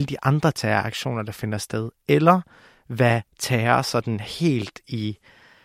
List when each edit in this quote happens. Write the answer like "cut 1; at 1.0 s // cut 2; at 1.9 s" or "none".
none